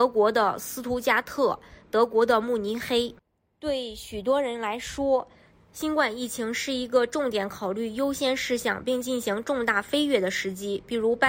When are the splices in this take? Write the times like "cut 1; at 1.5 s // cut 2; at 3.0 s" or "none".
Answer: none